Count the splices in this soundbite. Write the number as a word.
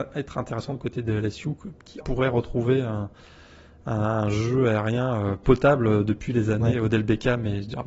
one